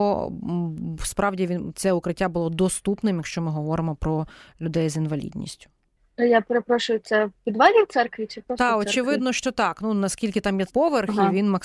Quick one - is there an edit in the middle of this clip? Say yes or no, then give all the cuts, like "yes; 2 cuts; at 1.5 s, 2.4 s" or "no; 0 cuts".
yes; 1 cut; at 10.7 s